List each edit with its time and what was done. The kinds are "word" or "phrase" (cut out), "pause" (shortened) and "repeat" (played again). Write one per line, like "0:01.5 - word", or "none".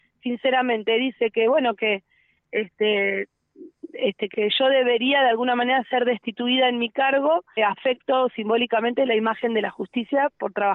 0:04.3 - word
0:07.6 - word